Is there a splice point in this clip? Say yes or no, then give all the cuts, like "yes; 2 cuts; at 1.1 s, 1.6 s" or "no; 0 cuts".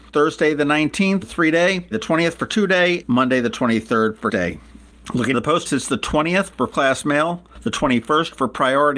yes; 7 cuts; at 1.2 s, 1.9 s, 3.0 s, 4.3 s, 5.3 s, 5.7 s, 6.7 s